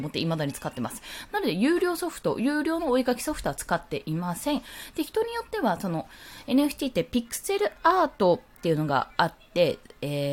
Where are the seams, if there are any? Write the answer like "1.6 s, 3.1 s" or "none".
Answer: none